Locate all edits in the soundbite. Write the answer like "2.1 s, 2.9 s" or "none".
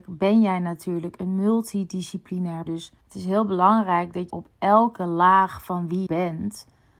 2.7 s, 3.0 s, 4.3 s, 6.1 s